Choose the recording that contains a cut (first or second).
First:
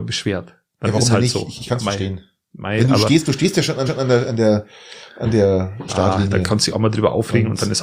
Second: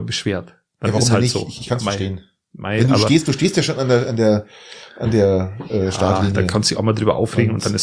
first